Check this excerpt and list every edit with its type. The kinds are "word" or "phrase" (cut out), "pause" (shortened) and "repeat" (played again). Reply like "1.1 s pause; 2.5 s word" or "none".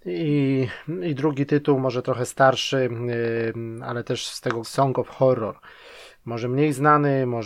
4.6 s phrase